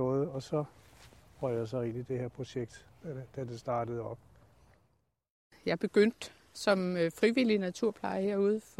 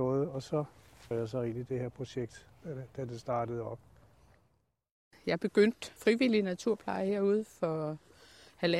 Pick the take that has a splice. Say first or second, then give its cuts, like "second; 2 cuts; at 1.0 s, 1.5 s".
second; 2 cuts; at 1.1 s, 6.0 s